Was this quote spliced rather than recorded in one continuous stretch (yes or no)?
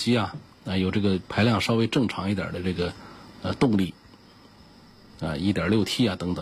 no